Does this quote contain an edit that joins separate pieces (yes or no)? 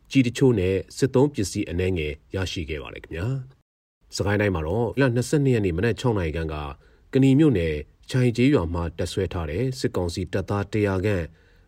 yes